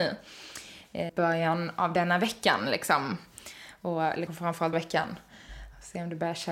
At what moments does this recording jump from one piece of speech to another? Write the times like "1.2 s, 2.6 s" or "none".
1.1 s, 4.3 s, 4.7 s